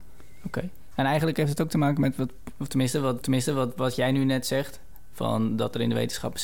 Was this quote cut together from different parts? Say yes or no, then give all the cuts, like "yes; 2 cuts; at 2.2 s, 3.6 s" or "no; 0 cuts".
yes; 1 cut; at 3.2 s